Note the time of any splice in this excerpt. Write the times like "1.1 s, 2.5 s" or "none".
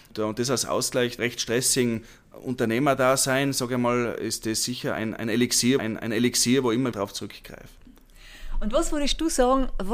1.2 s, 5.8 s, 6.9 s